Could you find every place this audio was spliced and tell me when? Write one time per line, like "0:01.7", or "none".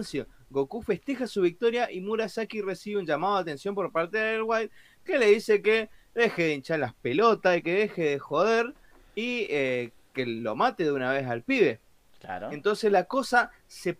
none